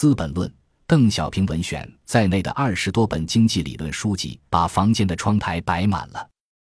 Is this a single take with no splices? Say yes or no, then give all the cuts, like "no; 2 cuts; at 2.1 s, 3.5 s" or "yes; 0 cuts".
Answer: no; 1 cut; at 4.5 s